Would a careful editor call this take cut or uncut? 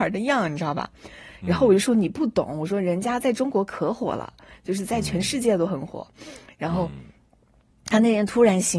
uncut